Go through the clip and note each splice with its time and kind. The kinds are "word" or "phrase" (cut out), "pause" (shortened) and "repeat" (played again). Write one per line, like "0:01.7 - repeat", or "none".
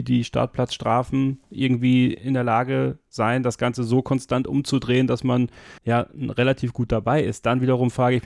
0:05.8 - pause